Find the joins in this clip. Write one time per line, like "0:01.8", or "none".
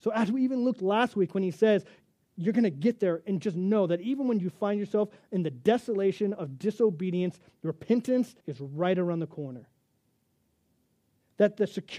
0:08.4